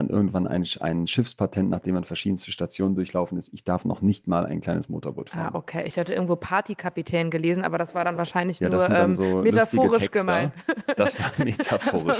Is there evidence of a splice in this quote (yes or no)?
no